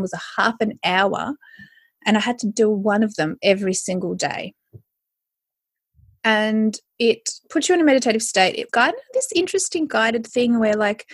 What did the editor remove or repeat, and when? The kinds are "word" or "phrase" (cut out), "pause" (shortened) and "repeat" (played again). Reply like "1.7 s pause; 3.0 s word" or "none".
8.7 s word